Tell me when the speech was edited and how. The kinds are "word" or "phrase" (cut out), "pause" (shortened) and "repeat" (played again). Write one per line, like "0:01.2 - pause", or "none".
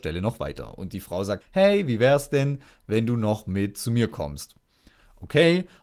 0:01.4 - word